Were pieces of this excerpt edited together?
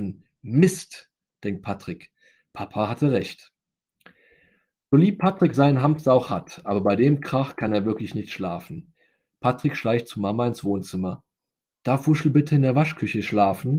no; 0 cuts

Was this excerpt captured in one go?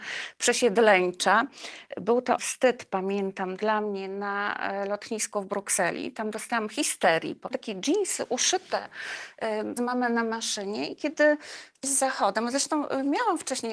no; 4 cuts; at 2.4 s, 7.5 s, 9.8 s, 11.8 s

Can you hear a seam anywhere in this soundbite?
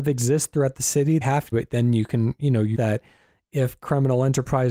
yes; 3 cuts; at 1.2 s, 1.5 s, 2.7 s

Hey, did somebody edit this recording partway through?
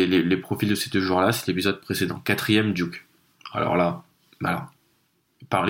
no; 0 cuts

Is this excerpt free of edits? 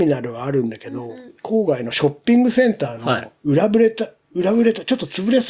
no; 2 cuts; at 1.4 s, 3.4 s

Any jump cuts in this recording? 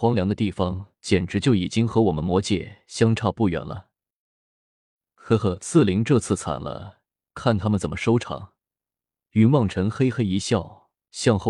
no; 0 cuts

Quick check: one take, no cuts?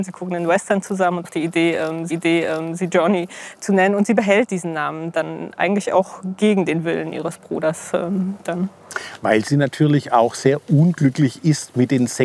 no; 3 cuts; at 1.2 s, 2.1 s, 5.6 s

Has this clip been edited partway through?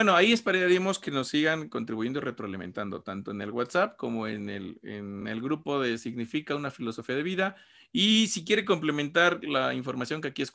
no; 0 cuts

